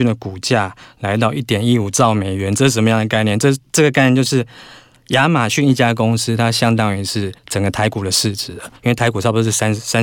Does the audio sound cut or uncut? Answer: cut